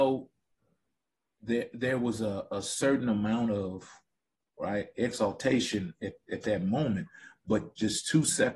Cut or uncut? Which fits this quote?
uncut